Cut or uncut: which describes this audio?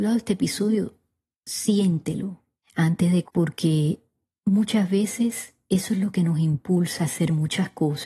cut